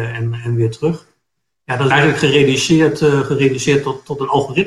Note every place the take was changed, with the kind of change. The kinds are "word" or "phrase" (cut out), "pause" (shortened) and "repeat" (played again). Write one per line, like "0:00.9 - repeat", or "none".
0:01.9 - word

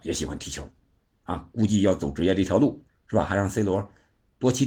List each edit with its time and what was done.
0:02.9 - pause

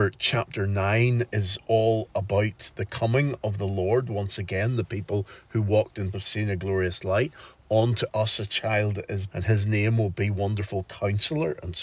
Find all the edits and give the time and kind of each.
0:06.1 - word
0:09.3 - word

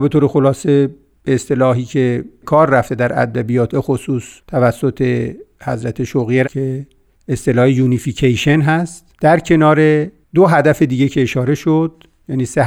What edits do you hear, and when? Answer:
0:02.4 - word
0:03.7 - word
0:04.4 - pause
0:06.4 - word

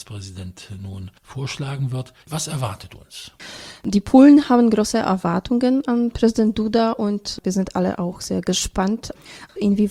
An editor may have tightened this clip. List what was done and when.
0:01.2 - pause
0:02.2 - pause

